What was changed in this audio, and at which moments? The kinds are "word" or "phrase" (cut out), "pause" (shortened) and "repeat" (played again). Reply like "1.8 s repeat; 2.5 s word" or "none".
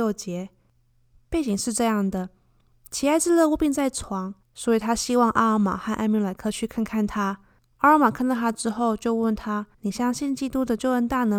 4.4 s pause; 7.6 s pause; 9.7 s pause